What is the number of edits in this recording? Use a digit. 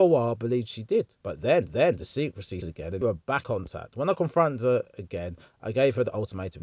5